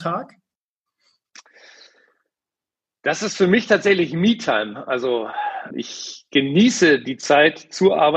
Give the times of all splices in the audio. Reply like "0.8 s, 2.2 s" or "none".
5.7 s